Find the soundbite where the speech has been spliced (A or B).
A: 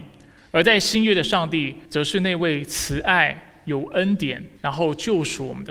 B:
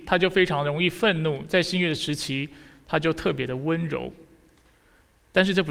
A